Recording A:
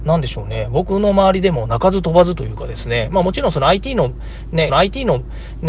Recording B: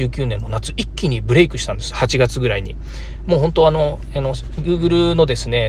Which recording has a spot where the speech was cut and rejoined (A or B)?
A